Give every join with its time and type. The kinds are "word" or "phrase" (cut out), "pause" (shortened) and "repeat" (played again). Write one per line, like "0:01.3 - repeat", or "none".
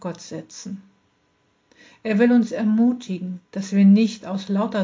0:03.5 - pause